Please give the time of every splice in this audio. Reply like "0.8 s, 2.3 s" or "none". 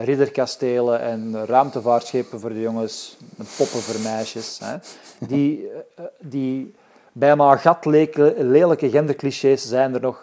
none